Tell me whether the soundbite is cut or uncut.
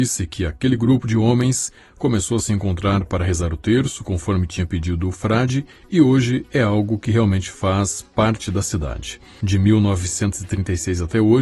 uncut